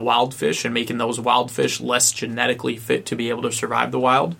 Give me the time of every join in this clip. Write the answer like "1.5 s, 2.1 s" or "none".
none